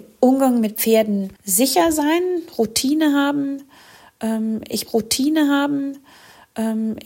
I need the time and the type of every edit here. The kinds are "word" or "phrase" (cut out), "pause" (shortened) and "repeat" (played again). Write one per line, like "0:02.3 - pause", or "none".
0:01.4 - pause
0:04.9 - repeat